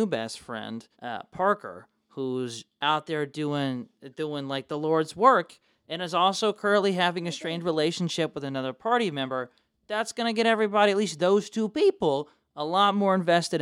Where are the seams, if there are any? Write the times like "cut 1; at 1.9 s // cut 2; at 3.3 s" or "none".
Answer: cut 1; at 0.9 s